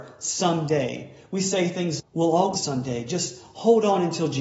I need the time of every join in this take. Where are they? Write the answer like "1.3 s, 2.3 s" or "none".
2.0 s, 2.5 s